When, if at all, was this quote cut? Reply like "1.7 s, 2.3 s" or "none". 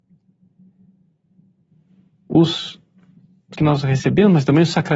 3.5 s